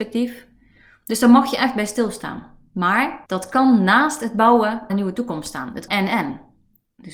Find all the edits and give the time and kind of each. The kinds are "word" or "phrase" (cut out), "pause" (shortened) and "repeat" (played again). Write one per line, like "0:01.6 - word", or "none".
0:03.3 - pause
0:04.9 - word
0:05.9 - word